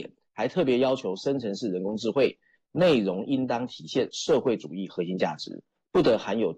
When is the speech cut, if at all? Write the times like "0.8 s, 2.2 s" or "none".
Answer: none